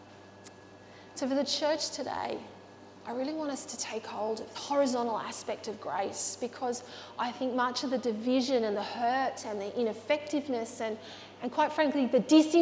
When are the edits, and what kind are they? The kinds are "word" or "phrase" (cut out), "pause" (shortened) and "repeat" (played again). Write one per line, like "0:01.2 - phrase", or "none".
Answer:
0:04.5 - phrase

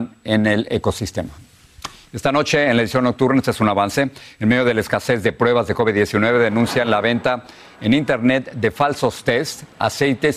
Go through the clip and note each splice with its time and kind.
none

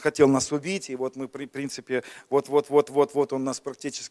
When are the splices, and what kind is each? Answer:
none

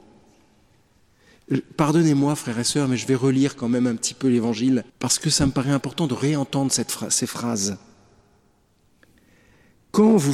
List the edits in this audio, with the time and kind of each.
0:04.9 - pause

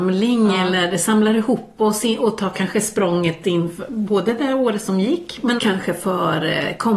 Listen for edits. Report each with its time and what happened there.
0:05.6 - word

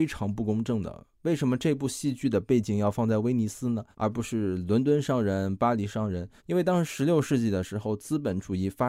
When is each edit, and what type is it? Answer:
0:03.9 - pause
0:06.4 - pause

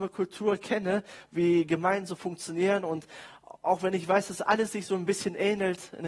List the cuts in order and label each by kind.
none

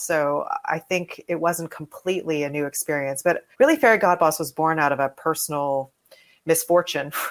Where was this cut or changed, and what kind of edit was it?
0:03.5 - pause

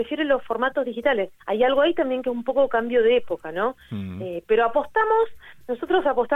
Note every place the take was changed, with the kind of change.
0:01.4 - pause

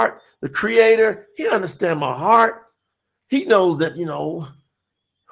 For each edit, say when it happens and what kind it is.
none

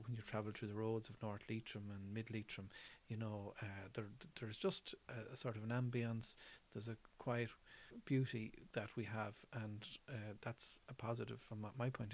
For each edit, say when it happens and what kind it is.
none

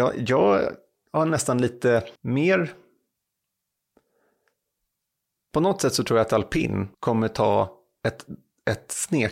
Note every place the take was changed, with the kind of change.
0:02.2 - pause
0:06.9 - pause

